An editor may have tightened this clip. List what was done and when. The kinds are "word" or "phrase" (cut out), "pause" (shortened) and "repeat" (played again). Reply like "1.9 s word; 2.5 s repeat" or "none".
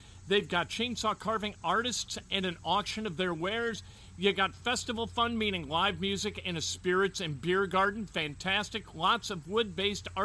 none